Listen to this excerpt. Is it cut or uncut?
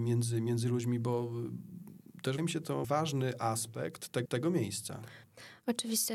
cut